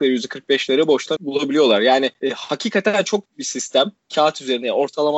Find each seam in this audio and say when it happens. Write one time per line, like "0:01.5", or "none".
0:01.2
0:03.3